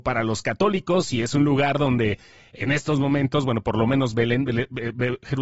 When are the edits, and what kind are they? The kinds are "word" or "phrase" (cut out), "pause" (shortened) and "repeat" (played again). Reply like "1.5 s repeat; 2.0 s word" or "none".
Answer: none